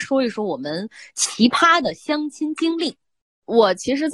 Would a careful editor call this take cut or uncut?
uncut